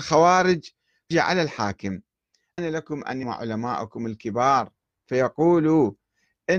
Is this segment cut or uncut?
cut